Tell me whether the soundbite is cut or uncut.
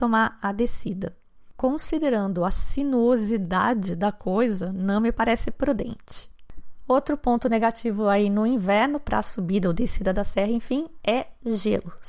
uncut